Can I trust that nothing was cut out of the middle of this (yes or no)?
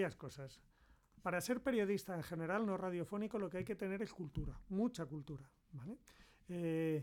yes